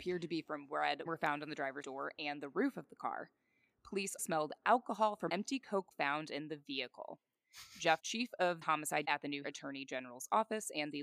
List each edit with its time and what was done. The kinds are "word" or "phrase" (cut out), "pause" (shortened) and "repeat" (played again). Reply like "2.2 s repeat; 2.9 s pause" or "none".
1.1 s word; 1.8 s word; 4.2 s word; 5.3 s word; 5.9 s word; 8.0 s word; 8.6 s word; 9.0 s word; 9.4 s word